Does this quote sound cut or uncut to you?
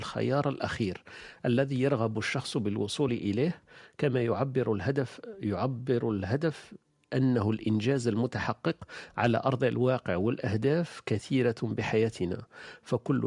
uncut